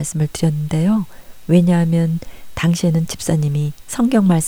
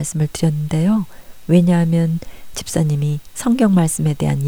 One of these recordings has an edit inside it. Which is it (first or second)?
second